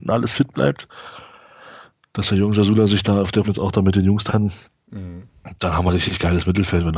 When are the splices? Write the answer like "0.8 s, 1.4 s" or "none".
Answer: 3.4 s, 4.3 s, 5.9 s